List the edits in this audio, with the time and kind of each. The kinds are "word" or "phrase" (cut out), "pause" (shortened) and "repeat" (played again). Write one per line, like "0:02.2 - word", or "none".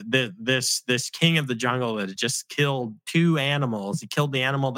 none